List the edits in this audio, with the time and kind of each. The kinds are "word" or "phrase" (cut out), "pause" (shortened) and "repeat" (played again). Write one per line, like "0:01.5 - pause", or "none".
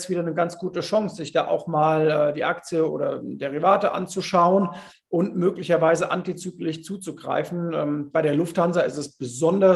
none